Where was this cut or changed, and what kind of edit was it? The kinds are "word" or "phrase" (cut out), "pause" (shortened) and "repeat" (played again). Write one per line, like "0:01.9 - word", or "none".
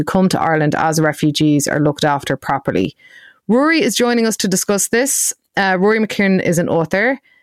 none

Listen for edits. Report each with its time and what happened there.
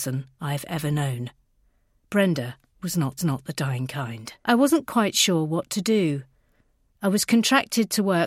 0:02.7 - pause
0:03.2 - repeat
0:04.4 - pause

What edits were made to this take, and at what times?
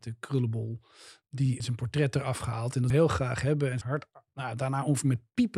0:01.6 - word
0:02.9 - phrase
0:03.8 - phrase

